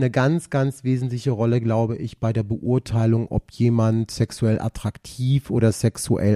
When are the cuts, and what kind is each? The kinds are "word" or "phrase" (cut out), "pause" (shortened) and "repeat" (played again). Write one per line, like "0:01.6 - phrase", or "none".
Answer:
none